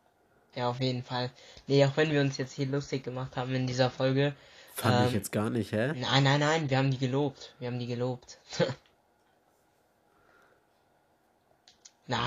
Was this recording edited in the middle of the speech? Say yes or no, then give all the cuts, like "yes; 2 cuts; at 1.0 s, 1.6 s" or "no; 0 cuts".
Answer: no; 0 cuts